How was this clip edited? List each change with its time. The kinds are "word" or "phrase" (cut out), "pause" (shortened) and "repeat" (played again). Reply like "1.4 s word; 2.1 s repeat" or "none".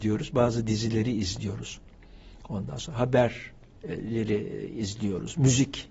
none